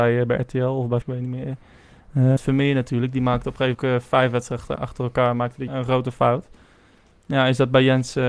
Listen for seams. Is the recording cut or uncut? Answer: cut